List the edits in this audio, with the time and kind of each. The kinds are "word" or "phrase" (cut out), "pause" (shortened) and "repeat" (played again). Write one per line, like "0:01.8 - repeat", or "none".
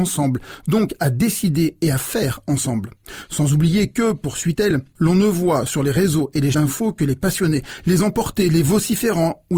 0:06.5 - word